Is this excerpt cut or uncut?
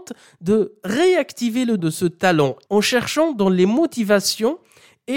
cut